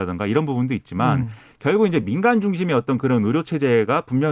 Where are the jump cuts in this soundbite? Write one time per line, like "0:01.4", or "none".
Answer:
none